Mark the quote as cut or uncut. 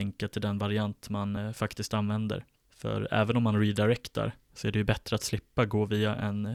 uncut